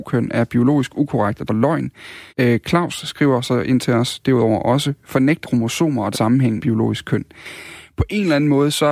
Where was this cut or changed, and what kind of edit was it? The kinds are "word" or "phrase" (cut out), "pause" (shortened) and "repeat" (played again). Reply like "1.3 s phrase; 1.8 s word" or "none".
1.5 s word; 2.3 s pause; 5.4 s word; 6.1 s word; 6.6 s word